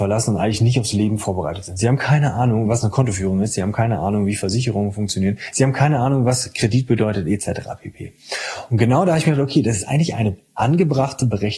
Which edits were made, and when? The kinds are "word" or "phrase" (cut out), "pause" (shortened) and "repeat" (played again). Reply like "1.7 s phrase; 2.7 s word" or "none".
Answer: none